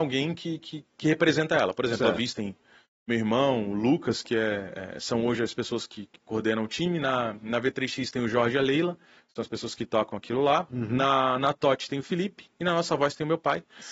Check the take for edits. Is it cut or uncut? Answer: uncut